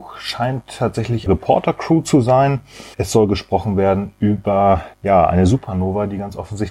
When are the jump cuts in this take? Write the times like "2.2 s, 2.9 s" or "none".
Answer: 1.3 s, 2.9 s, 4.9 s